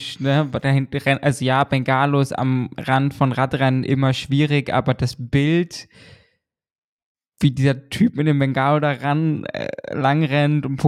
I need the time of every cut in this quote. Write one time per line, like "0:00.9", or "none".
none

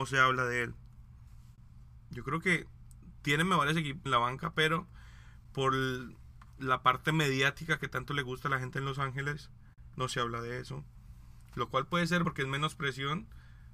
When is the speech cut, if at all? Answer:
0:04.1
0:12.2

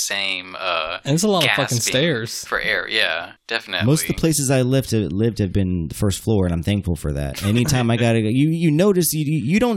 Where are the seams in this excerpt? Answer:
0:03.4

